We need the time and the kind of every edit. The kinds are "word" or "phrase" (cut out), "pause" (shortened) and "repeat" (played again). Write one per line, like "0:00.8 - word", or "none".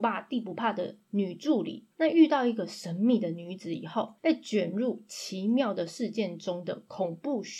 0:01.9 - pause
0:04.2 - pause